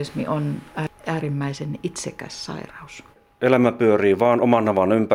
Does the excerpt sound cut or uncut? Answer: cut